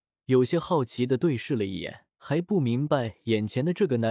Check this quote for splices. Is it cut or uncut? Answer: cut